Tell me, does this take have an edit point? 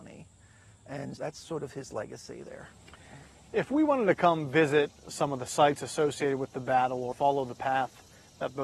yes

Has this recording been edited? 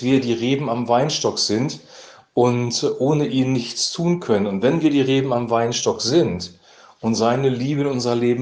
no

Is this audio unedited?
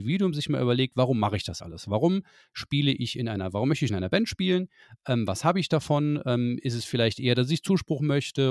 no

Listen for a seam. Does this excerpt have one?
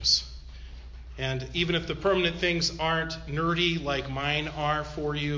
no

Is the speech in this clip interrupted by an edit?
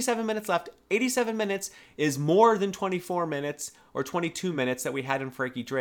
no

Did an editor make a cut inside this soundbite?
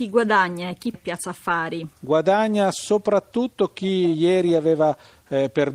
yes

